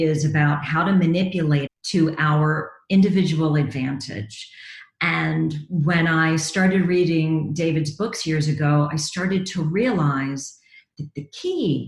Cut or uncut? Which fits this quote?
cut